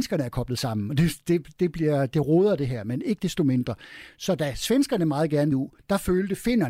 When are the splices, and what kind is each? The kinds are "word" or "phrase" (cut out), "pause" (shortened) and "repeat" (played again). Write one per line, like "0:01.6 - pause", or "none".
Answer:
0:05.5 - phrase